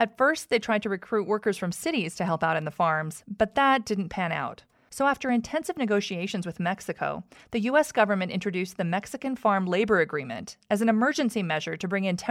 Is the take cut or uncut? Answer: uncut